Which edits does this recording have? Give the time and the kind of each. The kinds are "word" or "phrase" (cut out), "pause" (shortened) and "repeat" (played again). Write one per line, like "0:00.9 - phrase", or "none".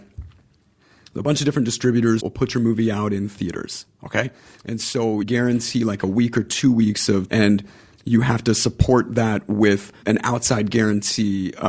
0:02.2 - word
0:05.2 - word
0:07.3 - word
0:10.0 - word

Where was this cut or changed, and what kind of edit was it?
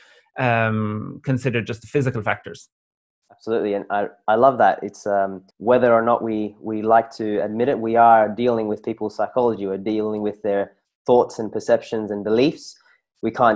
0:02.9 - pause
0:05.5 - pause

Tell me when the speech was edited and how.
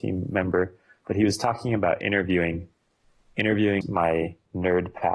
0:03.8 - word

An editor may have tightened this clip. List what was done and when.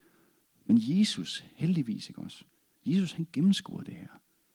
none

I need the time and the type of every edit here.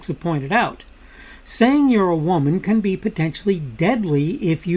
none

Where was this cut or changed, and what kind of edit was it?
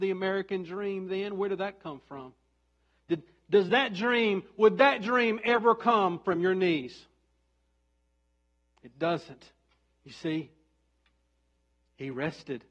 none

